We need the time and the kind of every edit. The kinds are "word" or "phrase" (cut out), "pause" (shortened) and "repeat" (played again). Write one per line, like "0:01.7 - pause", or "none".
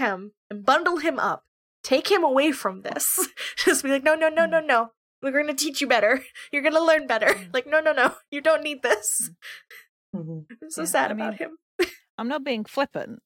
none